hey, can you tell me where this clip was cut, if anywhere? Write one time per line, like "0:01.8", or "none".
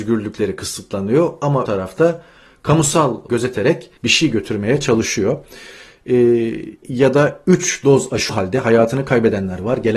0:01.7
0:03.3
0:04.0
0:06.8
0:08.3